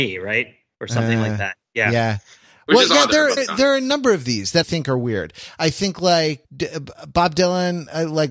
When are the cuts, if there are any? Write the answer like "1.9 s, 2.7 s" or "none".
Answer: 3.4 s, 4.6 s, 6.4 s